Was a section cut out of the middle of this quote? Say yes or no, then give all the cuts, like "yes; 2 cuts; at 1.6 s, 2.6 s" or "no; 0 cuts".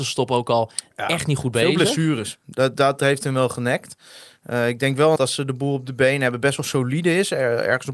yes; 1 cut; at 5.2 s